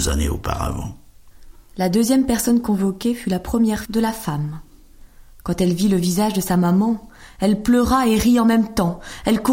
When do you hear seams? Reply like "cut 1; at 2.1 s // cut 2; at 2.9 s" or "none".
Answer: cut 1; at 3.9 s